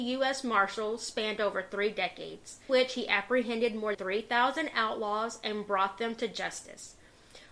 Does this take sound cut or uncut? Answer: cut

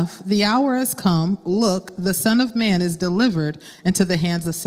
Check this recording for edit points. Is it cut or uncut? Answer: uncut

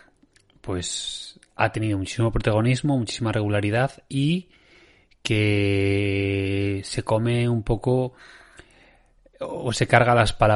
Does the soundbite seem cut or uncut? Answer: uncut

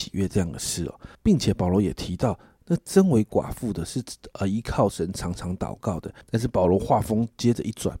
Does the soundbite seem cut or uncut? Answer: cut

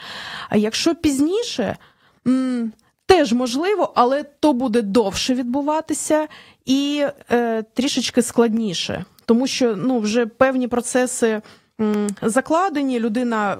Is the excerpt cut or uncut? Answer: uncut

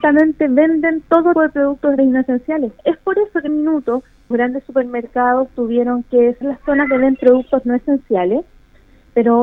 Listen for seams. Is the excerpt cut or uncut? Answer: cut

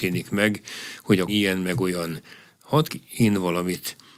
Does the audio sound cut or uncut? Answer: cut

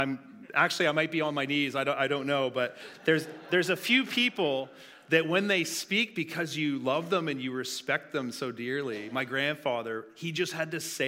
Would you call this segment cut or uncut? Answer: uncut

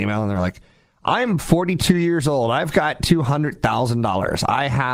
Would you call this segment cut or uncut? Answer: uncut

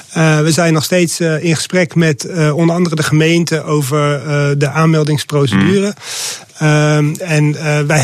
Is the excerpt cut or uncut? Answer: uncut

